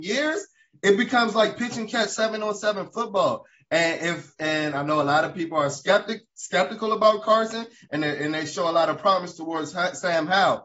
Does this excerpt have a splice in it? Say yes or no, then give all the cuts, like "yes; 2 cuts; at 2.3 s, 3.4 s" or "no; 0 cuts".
no; 0 cuts